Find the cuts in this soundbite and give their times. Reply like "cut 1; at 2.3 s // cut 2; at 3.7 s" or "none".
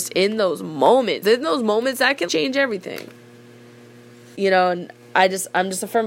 cut 1; at 1.2 s // cut 2; at 2.3 s // cut 3; at 4.4 s